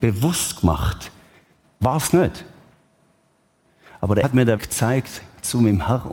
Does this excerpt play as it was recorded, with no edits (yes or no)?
no